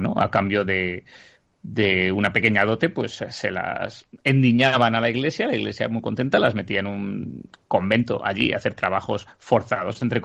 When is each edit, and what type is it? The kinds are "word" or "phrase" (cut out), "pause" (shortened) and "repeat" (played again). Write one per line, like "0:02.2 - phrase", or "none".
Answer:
none